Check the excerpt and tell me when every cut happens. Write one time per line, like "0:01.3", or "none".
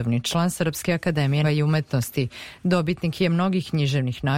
0:01.4